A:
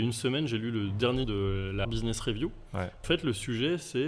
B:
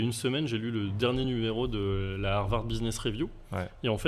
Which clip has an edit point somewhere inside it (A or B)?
A